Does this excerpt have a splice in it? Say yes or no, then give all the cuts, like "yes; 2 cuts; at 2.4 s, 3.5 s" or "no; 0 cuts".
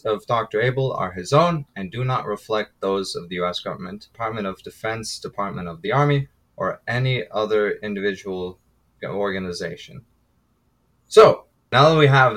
no; 0 cuts